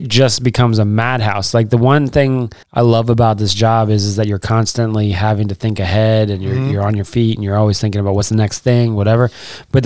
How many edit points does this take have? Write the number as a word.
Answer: one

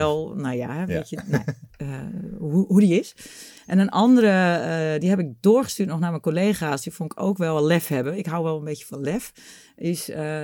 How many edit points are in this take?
one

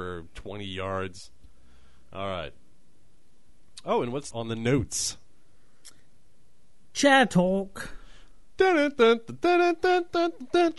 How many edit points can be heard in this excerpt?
one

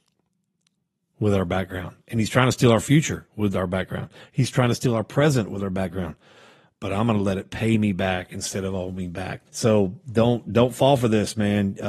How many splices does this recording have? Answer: one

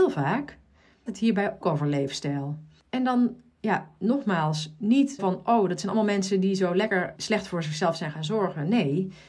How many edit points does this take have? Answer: five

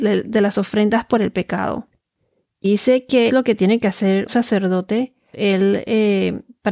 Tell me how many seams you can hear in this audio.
four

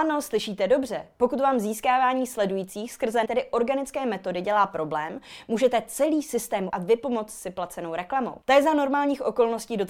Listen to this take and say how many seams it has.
three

